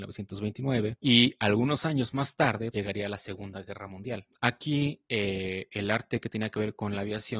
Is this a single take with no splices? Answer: no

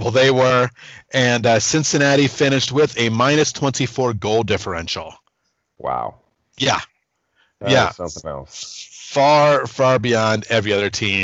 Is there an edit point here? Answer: no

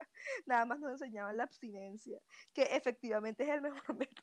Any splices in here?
no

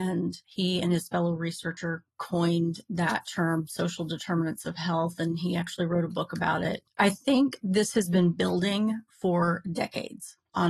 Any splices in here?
no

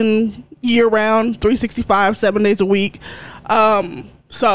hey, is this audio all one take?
yes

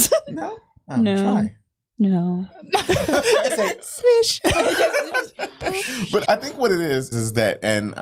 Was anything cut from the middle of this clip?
yes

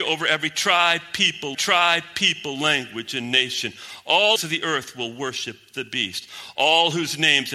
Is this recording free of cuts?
no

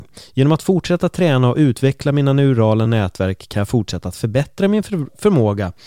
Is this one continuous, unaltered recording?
yes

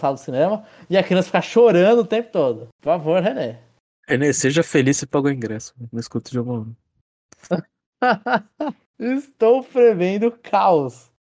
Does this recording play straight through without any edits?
yes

